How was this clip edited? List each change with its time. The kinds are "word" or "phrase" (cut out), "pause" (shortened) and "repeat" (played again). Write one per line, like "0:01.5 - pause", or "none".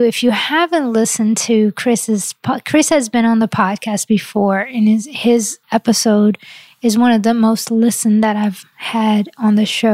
0:05.6 - pause